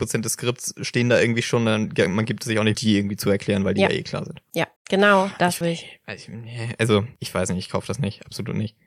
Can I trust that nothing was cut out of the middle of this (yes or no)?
no